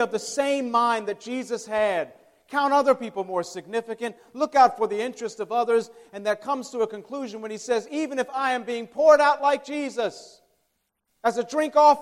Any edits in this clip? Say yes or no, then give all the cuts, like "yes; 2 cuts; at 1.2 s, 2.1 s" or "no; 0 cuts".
no; 0 cuts